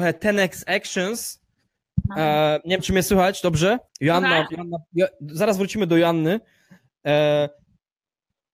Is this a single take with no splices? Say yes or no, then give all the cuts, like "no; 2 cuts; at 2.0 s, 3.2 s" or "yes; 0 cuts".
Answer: no; 1 cut; at 3.9 s